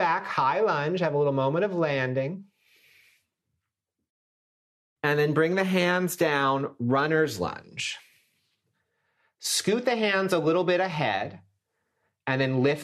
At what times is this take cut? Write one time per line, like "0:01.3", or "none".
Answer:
none